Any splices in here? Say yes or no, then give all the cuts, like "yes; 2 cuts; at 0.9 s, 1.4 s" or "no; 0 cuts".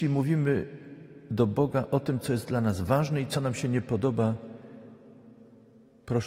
no; 0 cuts